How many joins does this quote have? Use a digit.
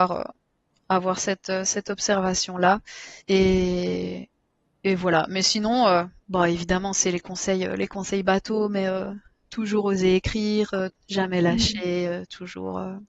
1